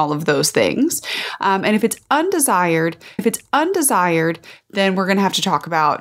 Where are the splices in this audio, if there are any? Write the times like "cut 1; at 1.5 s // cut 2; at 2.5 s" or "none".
cut 1; at 3.2 s